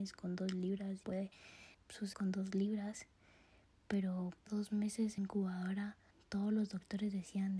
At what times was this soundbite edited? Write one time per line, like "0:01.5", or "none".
0:01.0
0:01.7
0:02.1
0:04.5
0:05.2
0:06.1